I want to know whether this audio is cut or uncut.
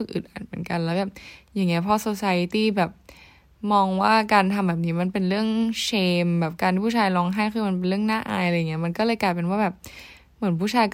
uncut